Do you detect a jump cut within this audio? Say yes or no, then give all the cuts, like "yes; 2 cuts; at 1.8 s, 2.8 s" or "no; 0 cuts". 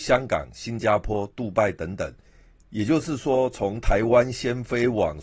no; 0 cuts